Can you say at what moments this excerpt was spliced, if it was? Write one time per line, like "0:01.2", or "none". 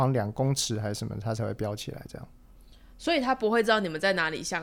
none